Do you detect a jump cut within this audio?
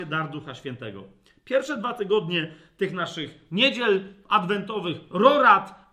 no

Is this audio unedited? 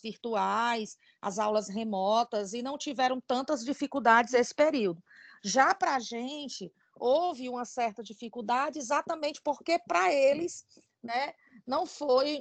yes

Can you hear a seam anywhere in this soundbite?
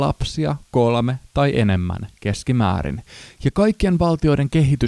no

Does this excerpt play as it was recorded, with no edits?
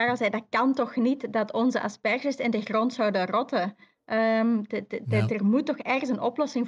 yes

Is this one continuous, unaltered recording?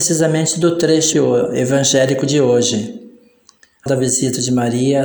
no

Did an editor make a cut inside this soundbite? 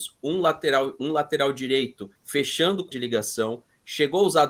yes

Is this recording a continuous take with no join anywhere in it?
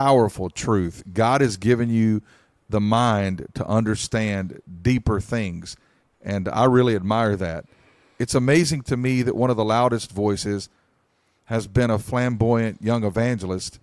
yes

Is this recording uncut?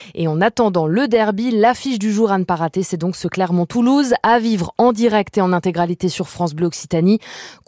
yes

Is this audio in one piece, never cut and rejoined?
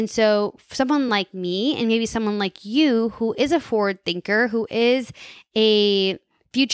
yes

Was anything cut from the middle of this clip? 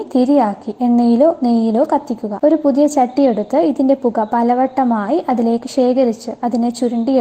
no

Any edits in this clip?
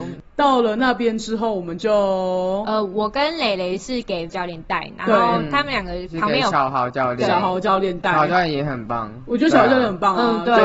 yes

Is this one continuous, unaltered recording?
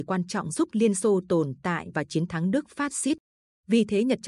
yes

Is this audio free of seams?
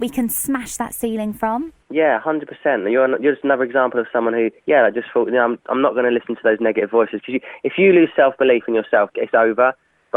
no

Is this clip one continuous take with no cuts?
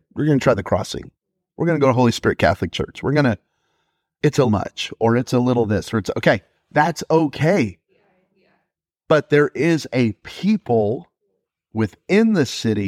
no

